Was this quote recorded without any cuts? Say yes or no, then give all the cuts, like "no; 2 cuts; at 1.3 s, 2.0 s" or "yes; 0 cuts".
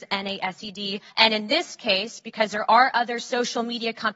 no; 1 cut; at 1.1 s